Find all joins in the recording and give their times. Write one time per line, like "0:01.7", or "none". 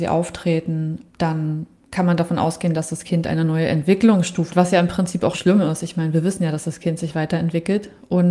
0:01.1
0:04.5
0:05.3